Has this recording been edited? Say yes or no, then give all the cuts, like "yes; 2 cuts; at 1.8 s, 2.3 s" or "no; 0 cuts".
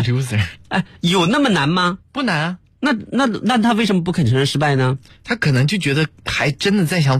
yes; 1 cut; at 2.0 s